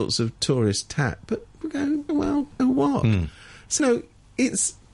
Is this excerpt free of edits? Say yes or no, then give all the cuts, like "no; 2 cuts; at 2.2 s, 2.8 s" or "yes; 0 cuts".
no; 4 cuts; at 1.6 s, 2.1 s, 2.6 s, 3.8 s